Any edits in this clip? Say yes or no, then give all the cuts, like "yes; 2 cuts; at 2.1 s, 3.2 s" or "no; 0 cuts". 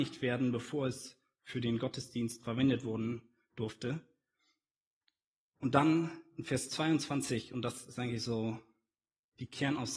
no; 0 cuts